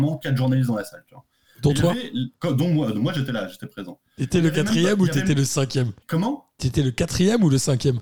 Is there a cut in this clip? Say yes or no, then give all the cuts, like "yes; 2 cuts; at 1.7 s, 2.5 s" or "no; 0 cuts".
yes; 2 cuts; at 2.4 s, 6.0 s